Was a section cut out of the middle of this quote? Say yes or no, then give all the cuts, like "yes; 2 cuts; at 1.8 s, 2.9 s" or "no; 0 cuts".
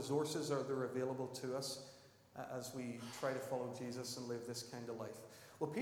no; 0 cuts